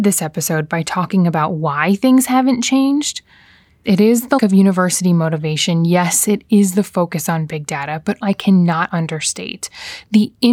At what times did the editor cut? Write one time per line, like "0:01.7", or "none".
0:03.8
0:04.4
0:08.2